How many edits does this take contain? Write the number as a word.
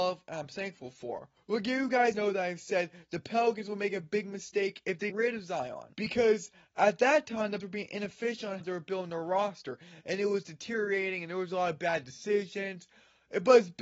six